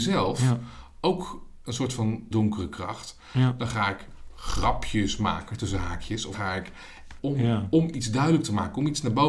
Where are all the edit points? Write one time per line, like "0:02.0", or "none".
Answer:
0:02.3
0:06.3
0:07.2